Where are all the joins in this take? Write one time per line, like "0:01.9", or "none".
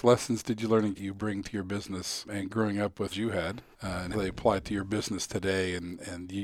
0:00.9
0:02.2
0:03.1
0:03.7
0:04.1